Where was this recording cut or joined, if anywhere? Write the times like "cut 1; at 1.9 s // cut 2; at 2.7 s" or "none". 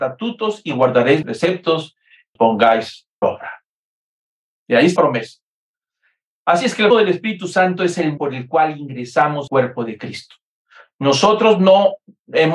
cut 1; at 1.2 s // cut 2; at 2.4 s // cut 3; at 3.2 s // cut 4; at 5.0 s // cut 5; at 6.9 s // cut 6; at 8.2 s // cut 7; at 9.5 s